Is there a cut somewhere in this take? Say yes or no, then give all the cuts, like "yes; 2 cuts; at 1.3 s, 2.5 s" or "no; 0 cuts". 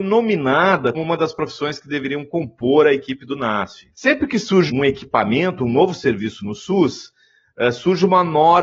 yes; 3 cuts; at 0.9 s, 3.9 s, 4.7 s